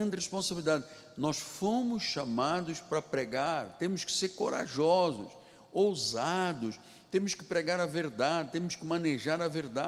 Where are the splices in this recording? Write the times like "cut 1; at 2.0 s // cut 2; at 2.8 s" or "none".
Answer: none